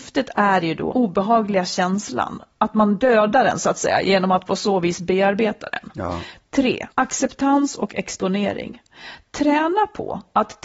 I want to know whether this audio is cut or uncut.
cut